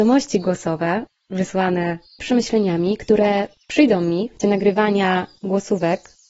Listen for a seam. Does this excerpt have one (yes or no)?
yes